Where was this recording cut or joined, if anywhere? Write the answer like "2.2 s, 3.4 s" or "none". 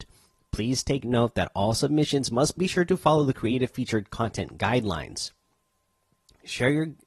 2.6 s